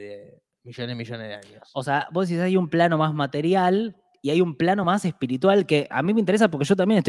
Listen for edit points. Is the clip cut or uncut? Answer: uncut